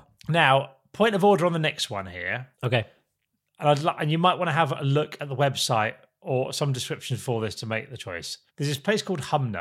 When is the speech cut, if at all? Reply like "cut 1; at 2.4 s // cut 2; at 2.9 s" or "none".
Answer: cut 1; at 2.5 s // cut 2; at 8.5 s